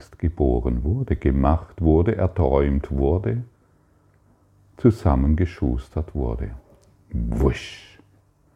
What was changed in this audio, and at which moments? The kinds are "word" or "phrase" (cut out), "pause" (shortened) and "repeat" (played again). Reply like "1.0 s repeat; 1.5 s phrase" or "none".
none